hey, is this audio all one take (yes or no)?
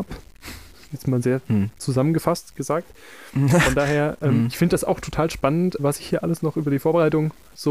no